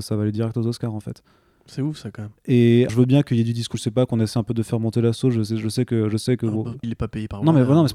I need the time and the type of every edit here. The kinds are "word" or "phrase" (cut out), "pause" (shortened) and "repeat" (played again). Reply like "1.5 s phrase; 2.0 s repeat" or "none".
2.9 s word; 3.7 s word; 6.8 s word